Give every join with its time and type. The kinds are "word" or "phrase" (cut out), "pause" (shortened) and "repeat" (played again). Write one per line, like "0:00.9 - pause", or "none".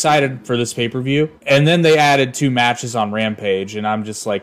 0:01.4 - pause